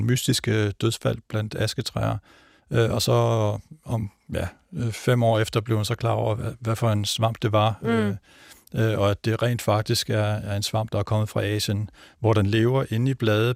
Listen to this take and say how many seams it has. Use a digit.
0